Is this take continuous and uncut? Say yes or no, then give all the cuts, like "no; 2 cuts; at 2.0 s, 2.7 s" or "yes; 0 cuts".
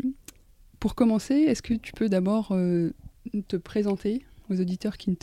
yes; 0 cuts